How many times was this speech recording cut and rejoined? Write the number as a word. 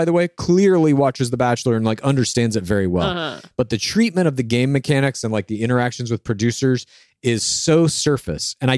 zero